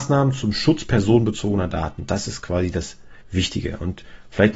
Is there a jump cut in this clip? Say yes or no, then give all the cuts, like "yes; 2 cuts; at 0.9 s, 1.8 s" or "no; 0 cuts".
yes; 1 cut; at 3.2 s